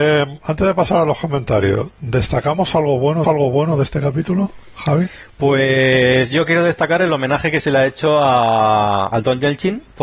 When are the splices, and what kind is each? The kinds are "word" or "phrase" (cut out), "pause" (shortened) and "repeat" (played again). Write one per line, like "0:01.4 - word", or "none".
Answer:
0:03.2 - repeat